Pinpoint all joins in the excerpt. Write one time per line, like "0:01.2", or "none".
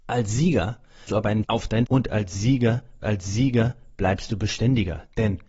0:01.1
0:01.4
0:01.9
0:03.0

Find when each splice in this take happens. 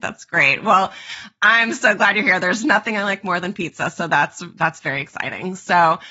none

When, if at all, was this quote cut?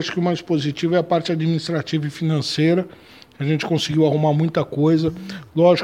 none

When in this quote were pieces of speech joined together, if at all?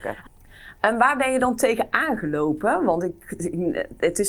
none

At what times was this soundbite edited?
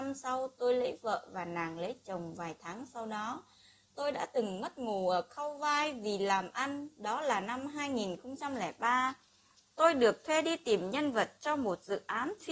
none

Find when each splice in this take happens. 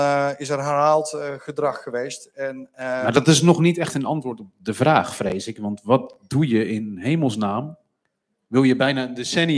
none

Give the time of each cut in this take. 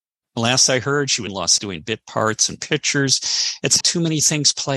0:01.3
0:01.6
0:03.8

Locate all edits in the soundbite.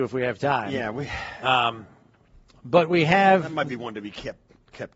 none

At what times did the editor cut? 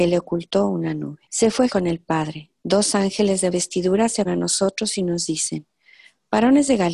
0:01.2
0:01.7
0:02.6
0:03.5
0:04.2

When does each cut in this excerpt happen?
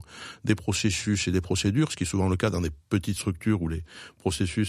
none

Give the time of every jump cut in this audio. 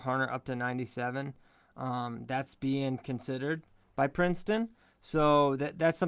none

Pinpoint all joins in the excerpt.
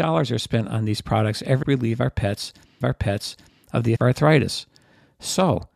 0:01.6
0:02.8
0:04.0

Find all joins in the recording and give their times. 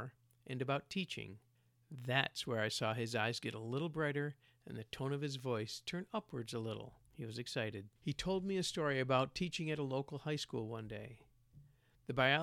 0:01.5
0:07.1
0:08.0

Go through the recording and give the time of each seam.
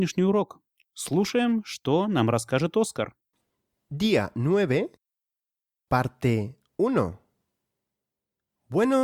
none

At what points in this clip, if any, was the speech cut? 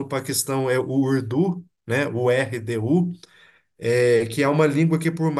none

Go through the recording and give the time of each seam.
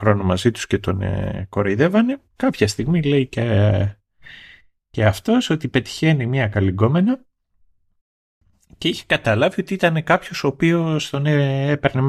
none

